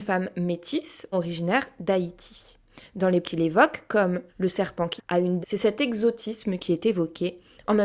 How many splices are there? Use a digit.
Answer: 5